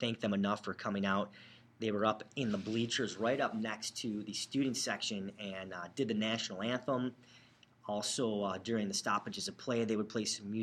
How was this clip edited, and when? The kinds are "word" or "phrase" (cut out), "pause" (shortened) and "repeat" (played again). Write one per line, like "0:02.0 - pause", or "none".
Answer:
none